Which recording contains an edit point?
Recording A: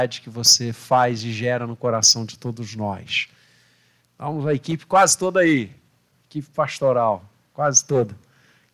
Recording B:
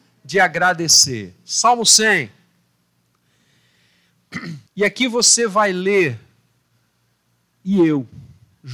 B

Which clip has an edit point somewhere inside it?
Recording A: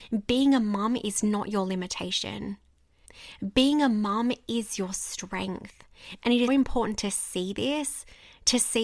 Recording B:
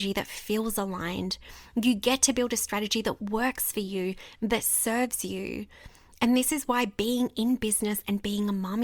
A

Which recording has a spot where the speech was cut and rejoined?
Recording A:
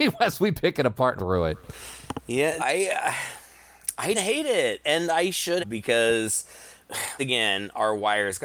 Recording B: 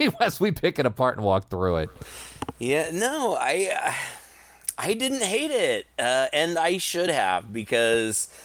A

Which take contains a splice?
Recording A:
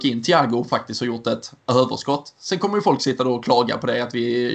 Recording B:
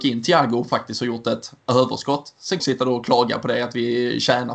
B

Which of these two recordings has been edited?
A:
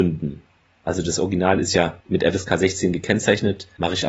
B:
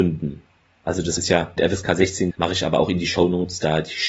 B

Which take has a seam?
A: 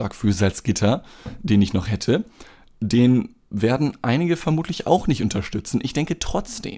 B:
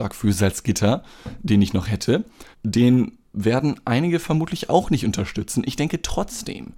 B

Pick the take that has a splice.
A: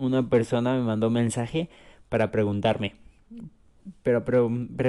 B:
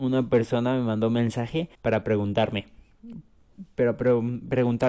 B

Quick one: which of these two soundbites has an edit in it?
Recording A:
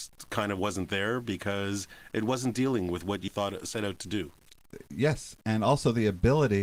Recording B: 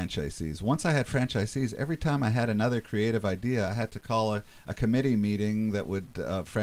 A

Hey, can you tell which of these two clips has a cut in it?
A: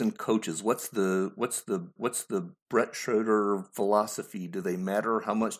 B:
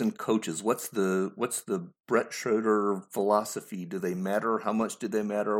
A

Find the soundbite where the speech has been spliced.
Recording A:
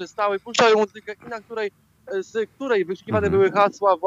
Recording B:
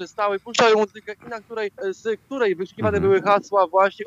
B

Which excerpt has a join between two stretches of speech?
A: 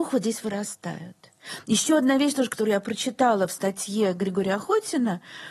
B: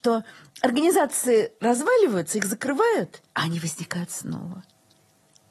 B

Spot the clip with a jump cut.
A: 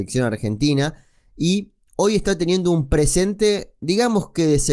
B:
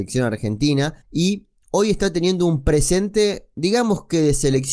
B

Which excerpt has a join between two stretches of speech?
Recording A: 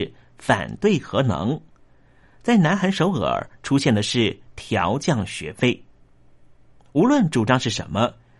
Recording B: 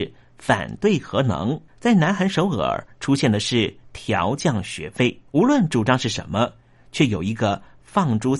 B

